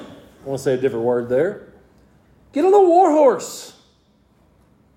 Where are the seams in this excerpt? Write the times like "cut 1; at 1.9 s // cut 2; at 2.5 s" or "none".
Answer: none